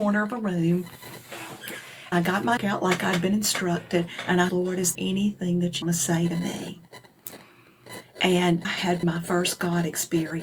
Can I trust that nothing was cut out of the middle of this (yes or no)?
no